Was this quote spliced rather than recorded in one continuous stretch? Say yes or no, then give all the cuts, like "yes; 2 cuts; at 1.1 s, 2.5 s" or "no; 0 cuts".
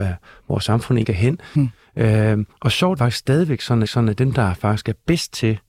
yes; 4 cuts; at 1.0 s, 2.5 s, 3.0 s, 3.8 s